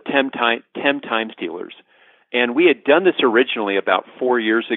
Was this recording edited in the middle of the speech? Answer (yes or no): no